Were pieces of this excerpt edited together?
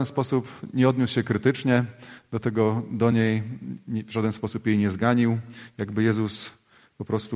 no; 0 cuts

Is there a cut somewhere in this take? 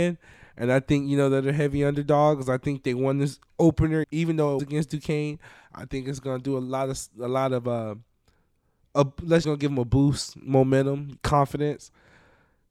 yes; 3 cuts; at 4.0 s, 4.6 s, 9.4 s

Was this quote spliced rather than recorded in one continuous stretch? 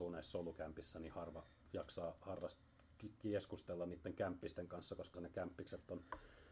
yes; 1 cut; at 5.1 s

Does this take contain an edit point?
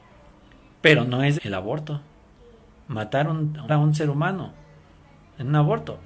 yes; 2 cuts; at 1.4 s, 3.7 s

